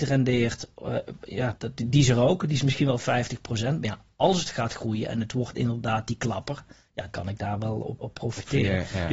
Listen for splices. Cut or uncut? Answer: cut